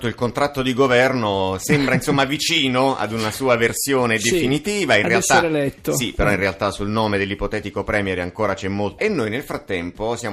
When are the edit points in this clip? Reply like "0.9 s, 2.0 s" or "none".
9.0 s